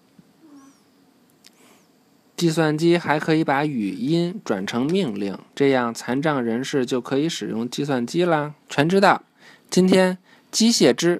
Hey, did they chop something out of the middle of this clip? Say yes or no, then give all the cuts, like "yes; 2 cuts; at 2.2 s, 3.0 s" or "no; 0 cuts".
yes; 2 cuts; at 5.4 s, 8.6 s